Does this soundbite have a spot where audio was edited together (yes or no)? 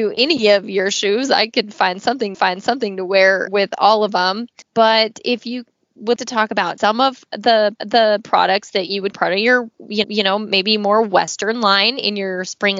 yes